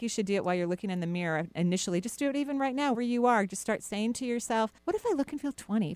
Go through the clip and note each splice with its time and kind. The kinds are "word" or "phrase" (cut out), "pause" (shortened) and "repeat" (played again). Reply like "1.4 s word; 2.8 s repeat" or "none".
2.9 s word; 4.8 s pause